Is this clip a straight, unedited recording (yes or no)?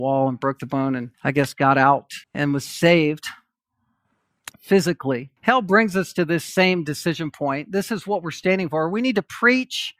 no